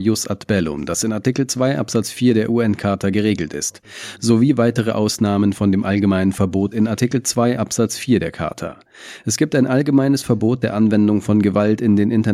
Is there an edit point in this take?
no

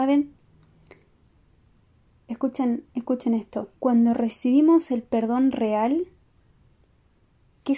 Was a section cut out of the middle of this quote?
yes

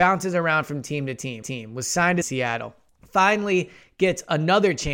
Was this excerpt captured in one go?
no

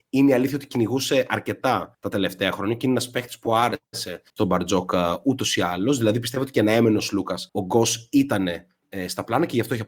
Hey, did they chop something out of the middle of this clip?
yes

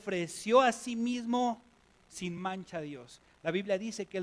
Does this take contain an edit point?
no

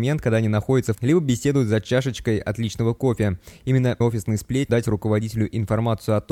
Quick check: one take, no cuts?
no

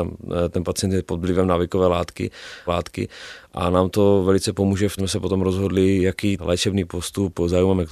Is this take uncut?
no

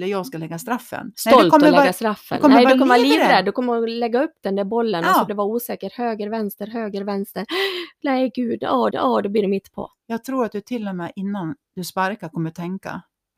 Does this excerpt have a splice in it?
yes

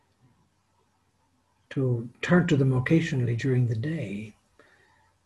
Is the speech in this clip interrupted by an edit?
no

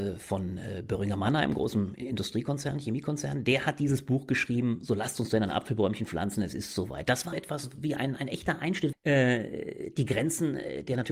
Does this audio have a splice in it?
yes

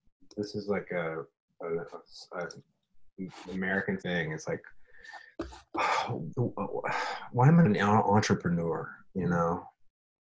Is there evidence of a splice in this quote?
yes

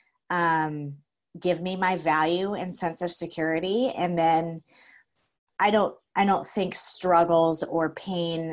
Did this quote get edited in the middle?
no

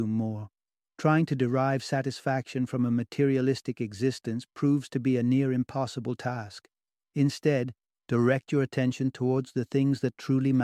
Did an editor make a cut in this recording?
no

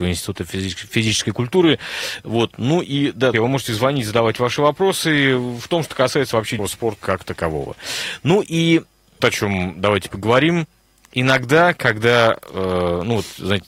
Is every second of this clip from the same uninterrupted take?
no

